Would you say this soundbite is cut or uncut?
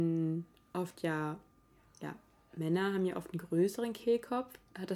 uncut